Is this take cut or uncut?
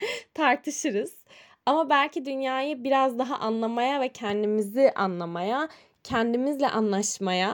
uncut